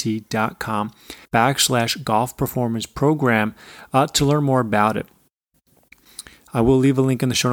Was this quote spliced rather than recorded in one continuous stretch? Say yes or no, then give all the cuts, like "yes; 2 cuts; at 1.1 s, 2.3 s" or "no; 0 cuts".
yes; 1 cut; at 1.2 s